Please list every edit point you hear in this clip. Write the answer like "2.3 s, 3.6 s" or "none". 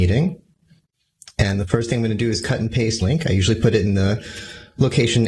3.0 s